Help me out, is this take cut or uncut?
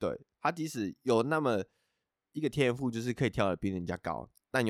uncut